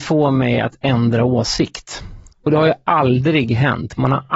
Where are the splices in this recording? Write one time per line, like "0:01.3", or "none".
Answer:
0:02.3